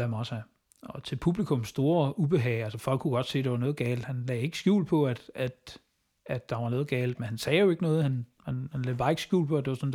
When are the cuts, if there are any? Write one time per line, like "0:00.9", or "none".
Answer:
none